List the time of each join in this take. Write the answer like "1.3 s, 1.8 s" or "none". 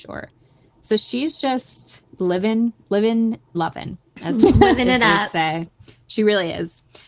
2.1 s, 3.5 s